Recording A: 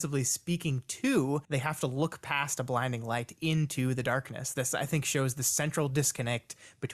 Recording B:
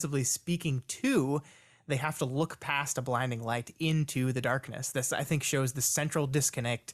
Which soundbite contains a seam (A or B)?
A